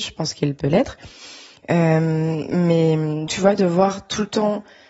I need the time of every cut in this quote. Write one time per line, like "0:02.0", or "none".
0:03.3